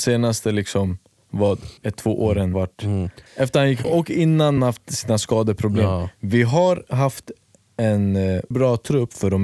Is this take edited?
yes; 6 cuts; at 1.8 s, 2.5 s, 3.3 s, 3.8 s, 4.6 s, 8.5 s

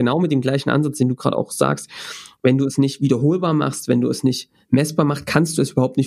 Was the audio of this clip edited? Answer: no; 0 cuts

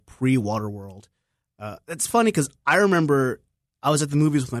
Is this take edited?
no; 0 cuts

